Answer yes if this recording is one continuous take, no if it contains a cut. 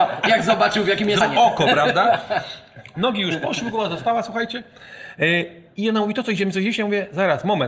no